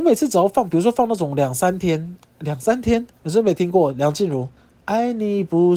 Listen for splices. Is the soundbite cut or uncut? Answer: cut